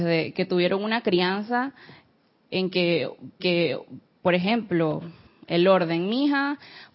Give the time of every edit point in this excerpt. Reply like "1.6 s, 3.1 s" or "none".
3.4 s, 5.3 s